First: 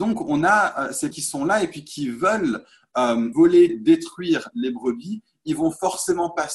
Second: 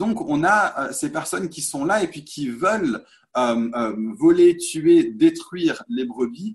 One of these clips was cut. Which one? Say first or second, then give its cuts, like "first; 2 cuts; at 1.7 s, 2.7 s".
first; 3 cuts; at 1.1 s, 3.3 s, 3.7 s